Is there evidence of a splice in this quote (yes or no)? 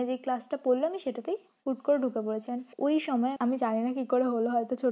yes